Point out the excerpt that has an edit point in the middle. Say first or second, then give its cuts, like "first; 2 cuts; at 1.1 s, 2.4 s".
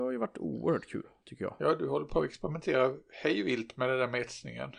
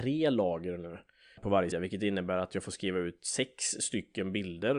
second; 2 cuts; at 1.4 s, 1.7 s